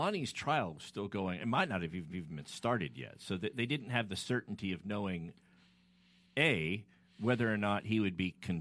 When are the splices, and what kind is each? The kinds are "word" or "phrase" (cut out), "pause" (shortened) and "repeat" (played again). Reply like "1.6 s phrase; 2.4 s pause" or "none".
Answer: 2.1 s repeat